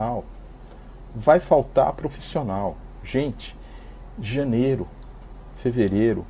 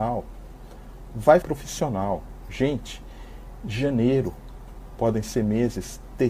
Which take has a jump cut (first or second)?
second